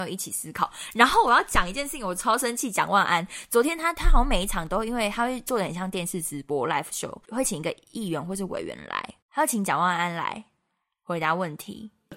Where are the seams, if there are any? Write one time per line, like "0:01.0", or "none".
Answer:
0:07.2
0:09.2